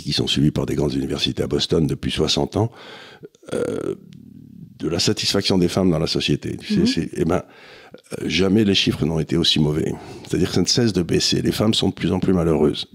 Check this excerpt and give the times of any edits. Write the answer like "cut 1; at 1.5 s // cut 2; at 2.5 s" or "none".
none